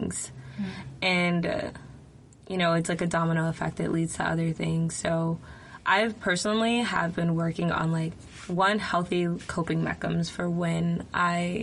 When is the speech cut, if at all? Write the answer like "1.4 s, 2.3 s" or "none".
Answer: none